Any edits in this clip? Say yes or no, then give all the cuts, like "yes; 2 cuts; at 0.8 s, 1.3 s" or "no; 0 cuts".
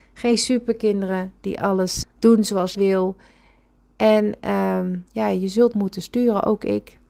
yes; 4 cuts; at 2.0 s, 2.7 s, 5.1 s, 5.7 s